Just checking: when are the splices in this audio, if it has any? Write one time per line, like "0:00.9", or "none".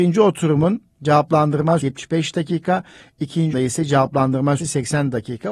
0:01.8
0:03.5
0:04.6